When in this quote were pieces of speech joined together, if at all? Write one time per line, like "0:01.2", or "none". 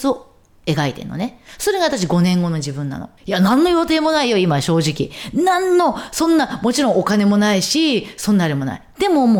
0:03.2